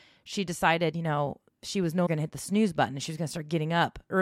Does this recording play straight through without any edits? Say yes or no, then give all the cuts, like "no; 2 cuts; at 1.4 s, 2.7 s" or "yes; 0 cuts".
no; 1 cut; at 2.1 s